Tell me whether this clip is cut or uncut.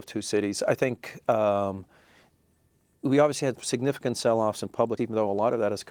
cut